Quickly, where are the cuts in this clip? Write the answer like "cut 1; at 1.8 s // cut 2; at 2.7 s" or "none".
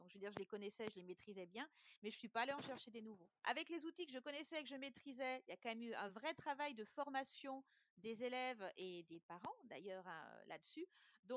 none